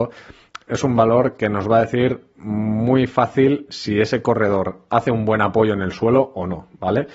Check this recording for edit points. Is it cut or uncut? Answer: uncut